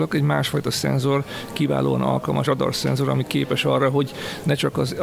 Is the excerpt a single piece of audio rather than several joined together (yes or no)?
no